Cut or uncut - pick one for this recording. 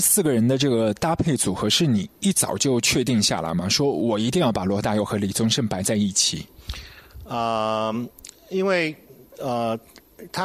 uncut